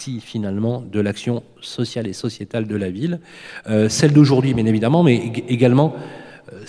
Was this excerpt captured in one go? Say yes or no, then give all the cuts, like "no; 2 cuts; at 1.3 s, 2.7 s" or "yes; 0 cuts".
yes; 0 cuts